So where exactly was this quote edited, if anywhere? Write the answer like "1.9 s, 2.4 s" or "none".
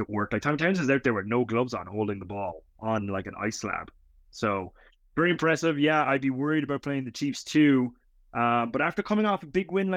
none